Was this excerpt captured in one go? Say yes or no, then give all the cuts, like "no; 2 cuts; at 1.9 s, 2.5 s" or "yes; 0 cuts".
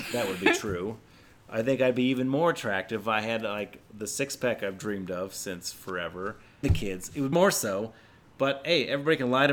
no; 2 cuts; at 6.6 s, 7.3 s